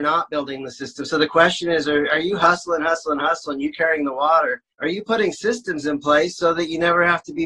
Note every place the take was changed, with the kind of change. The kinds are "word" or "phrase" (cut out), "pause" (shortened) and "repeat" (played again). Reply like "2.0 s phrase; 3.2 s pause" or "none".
4.7 s pause